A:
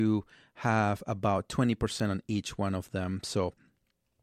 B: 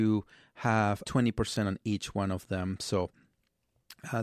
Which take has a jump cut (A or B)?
B